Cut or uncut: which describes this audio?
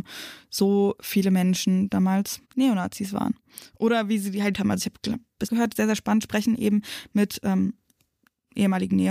cut